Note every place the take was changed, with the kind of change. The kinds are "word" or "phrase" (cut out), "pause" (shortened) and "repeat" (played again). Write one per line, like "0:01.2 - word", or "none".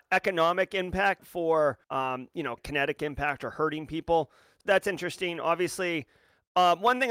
0:01.2 - word
0:01.8 - pause
0:02.6 - word
0:04.6 - word